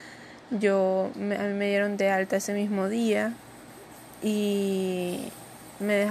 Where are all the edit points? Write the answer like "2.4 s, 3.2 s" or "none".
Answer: none